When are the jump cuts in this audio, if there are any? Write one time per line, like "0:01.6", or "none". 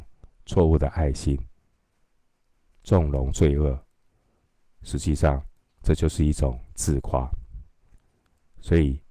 none